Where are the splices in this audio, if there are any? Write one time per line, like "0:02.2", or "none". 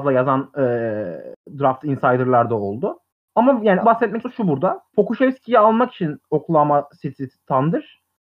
0:03.1
0:03.8
0:04.2
0:04.9